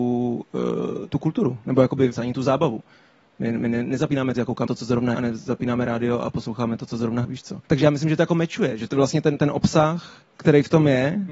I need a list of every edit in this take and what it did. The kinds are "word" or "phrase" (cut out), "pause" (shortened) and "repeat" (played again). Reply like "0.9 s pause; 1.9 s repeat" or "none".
2.1 s word; 4.3 s word; 4.7 s word; 5.1 s word; 7.2 s word; 7.7 s pause; 10.3 s pause